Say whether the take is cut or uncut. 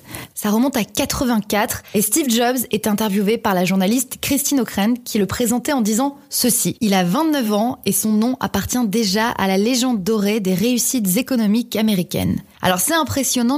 uncut